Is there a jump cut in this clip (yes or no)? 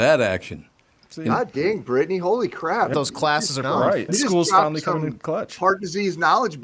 yes